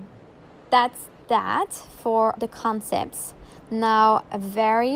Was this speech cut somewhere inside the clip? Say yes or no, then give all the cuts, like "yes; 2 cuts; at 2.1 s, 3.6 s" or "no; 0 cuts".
yes; 1 cut; at 2.4 s